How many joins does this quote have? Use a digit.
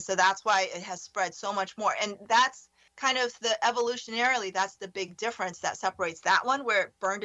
1